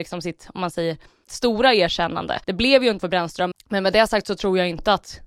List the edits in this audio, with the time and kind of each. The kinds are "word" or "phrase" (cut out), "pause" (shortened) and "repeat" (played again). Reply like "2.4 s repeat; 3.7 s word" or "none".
1.3 s word; 2.4 s pause; 3.0 s word; 3.5 s word